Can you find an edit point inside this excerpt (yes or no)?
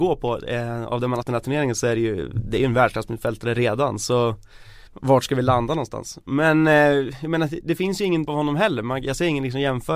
yes